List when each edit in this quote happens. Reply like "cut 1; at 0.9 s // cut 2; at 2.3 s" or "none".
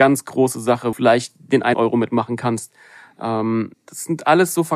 cut 1; at 0.9 s // cut 2; at 1.7 s // cut 3; at 3.7 s